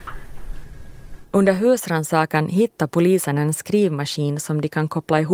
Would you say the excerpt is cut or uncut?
cut